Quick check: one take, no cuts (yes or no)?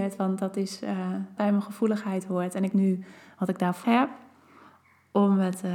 no